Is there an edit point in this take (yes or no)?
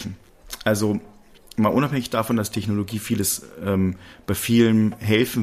no